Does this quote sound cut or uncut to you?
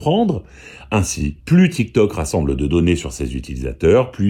cut